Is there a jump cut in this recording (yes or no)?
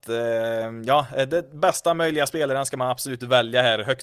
no